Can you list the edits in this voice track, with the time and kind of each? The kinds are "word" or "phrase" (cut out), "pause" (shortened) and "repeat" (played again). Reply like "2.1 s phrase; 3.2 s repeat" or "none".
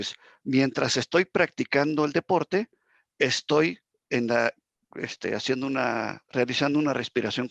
none

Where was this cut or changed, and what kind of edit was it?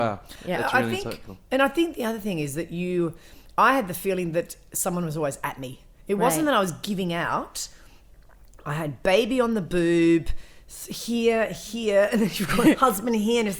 none

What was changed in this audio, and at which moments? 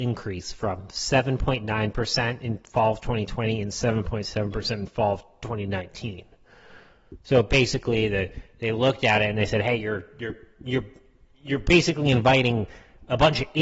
none

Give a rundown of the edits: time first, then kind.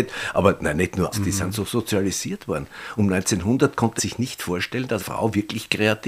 1.1 s word; 4.0 s word; 5.0 s word

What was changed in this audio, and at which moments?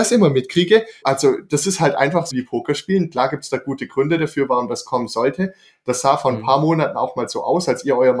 1.0 s word; 2.3 s phrase

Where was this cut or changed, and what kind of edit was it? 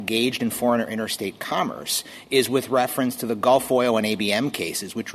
none

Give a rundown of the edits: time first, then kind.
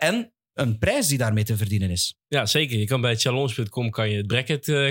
none

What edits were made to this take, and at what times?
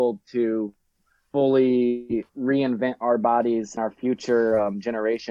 2.3 s pause; 3.8 s word

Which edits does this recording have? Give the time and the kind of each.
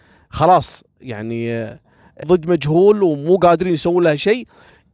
2.2 s word

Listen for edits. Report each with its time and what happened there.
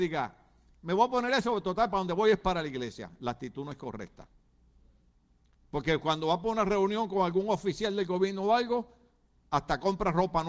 none

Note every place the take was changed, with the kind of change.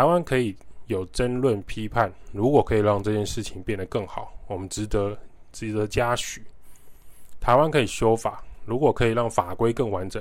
none

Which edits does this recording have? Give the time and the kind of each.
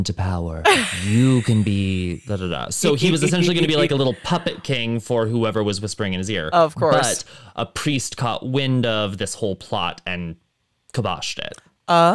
none

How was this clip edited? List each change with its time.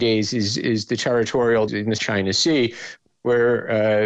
1.7 s word; 2.0 s word

